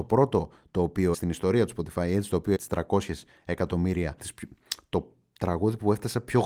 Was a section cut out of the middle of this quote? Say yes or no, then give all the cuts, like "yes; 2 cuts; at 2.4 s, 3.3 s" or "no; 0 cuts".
yes; 3 cuts; at 1.1 s, 2.5 s, 4.2 s